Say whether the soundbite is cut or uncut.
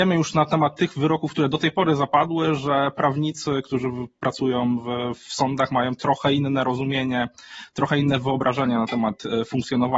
uncut